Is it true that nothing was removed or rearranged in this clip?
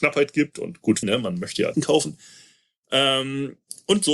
no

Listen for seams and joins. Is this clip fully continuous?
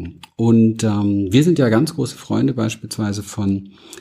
yes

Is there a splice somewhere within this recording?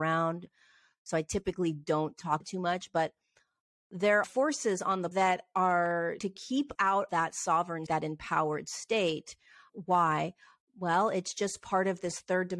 yes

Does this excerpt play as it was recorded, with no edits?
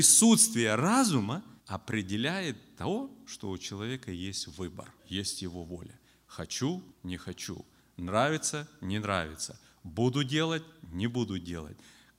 no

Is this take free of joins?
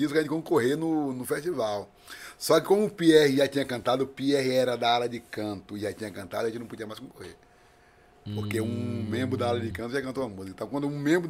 yes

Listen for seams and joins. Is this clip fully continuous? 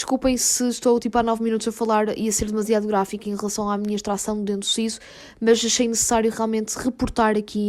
yes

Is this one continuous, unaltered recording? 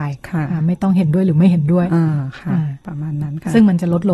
no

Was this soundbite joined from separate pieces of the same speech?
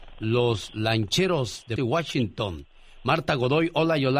yes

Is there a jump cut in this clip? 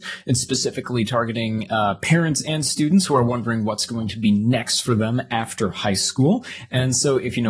no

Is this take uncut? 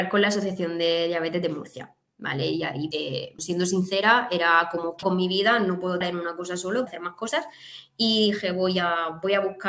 no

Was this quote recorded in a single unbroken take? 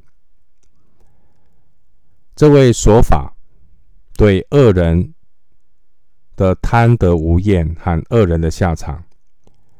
yes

